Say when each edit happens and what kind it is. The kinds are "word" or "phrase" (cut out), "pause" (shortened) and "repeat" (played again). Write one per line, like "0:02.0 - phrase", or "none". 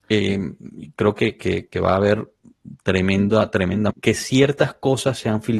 0:03.9 - word